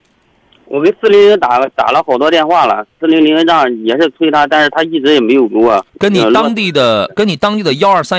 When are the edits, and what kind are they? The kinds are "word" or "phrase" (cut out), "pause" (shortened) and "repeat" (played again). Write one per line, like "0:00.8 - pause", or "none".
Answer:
0:05.9 - pause